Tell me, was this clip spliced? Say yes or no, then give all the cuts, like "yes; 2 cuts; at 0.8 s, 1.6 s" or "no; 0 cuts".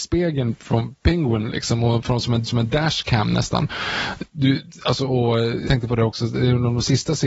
yes; 2 cuts; at 2.5 s, 5.7 s